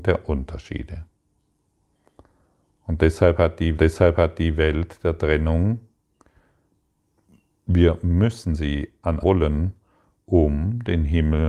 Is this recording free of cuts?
no; 2 cuts; at 3.8 s, 9.2 s

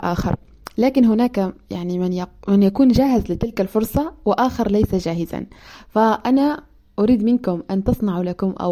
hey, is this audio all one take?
yes; 0 cuts

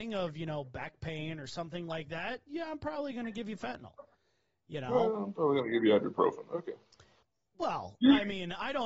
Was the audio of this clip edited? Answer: no; 0 cuts

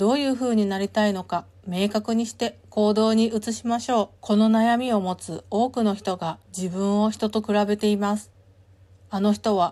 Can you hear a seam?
yes; 2 cuts; at 4.2 s, 6.5 s

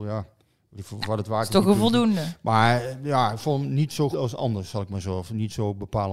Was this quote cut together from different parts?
yes; 1 cut; at 4.1 s

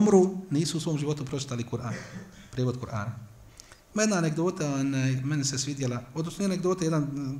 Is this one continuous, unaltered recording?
yes; 0 cuts

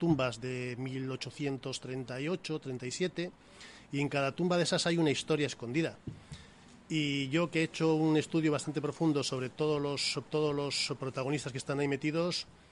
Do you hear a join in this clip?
yes; 1 cut; at 10.2 s

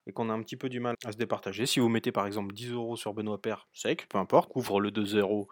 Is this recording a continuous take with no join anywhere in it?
no; 3 cuts; at 0.9 s, 4.1 s, 4.5 s

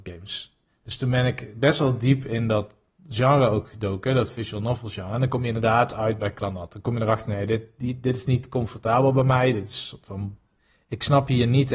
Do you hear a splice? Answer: no; 0 cuts

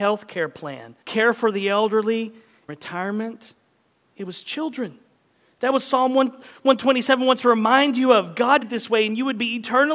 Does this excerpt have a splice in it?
yes; 3 cuts; at 1.0 s, 2.7 s, 8.6 s

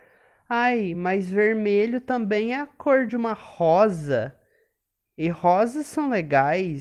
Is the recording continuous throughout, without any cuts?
yes; 0 cuts

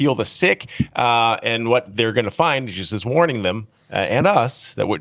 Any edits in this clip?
no; 0 cuts

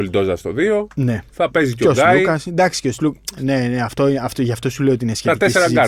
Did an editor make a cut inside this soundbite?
no; 0 cuts

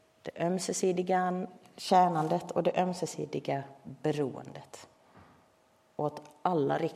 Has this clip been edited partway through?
no; 0 cuts

